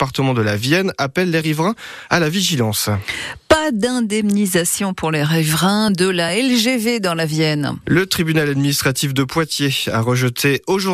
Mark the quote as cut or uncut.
uncut